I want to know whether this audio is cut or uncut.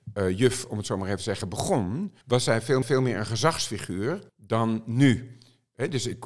cut